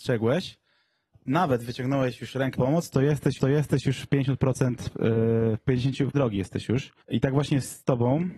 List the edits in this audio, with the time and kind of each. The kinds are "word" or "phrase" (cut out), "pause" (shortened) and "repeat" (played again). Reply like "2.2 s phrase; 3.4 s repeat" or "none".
1.1 s word; 2.5 s word; 3.4 s repeat; 6.1 s word; 7.0 s pause